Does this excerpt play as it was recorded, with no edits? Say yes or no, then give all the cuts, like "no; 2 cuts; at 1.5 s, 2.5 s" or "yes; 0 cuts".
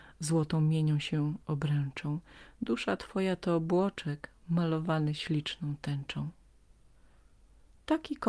yes; 0 cuts